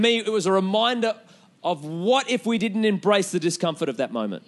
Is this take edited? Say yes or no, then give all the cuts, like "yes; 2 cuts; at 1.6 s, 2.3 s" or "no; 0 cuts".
no; 0 cuts